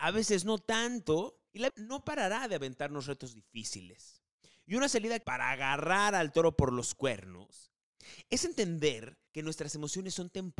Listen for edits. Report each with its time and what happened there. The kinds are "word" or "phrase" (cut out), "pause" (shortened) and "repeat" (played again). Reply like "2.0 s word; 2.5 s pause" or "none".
1.7 s word; 5.2 s word; 9.3 s pause